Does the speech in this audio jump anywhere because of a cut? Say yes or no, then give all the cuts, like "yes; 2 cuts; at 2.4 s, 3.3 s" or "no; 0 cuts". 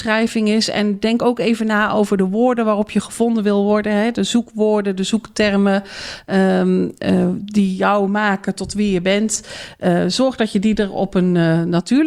no; 0 cuts